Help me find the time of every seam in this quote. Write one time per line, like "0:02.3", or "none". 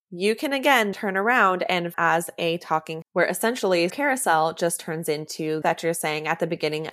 0:00.9
0:01.9
0:03.0
0:03.9
0:05.6